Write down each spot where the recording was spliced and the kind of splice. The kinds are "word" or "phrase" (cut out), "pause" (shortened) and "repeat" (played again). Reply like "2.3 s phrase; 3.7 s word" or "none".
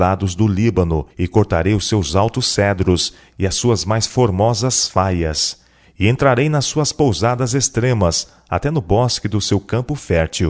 1.1 s pause